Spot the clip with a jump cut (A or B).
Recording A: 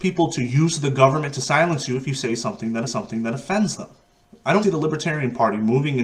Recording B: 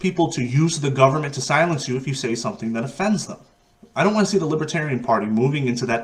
A